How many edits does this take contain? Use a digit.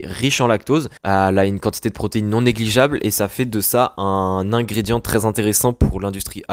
1